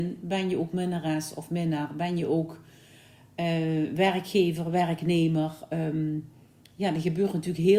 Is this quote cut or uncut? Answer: uncut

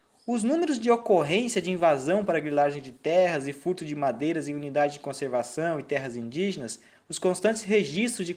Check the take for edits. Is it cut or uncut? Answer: uncut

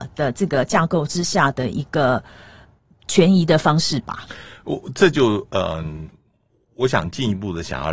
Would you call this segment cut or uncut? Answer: uncut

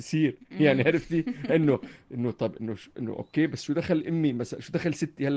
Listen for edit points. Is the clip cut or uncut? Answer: uncut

